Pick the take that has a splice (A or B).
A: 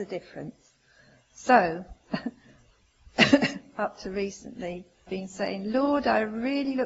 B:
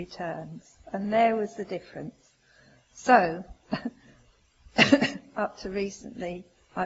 A